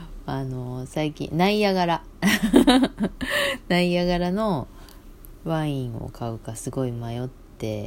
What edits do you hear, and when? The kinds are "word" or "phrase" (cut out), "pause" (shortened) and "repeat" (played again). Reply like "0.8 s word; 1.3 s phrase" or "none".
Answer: none